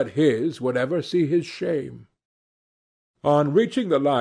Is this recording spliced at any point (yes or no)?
no